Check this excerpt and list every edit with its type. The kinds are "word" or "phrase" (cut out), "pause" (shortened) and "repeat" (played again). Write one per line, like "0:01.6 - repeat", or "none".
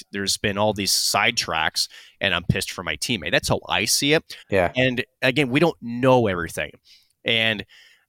0:04.4 - pause

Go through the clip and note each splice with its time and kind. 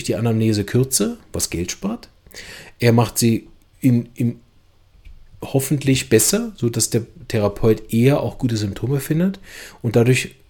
none

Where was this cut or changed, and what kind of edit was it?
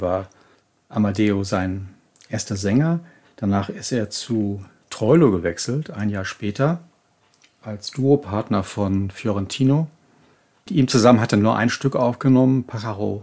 none

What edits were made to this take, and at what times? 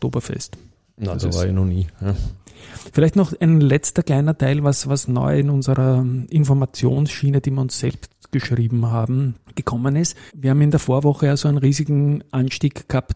0:09.4 - pause
0:10.3 - pause

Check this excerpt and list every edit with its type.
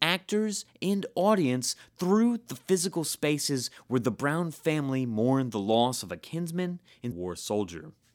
0:07.1 - word

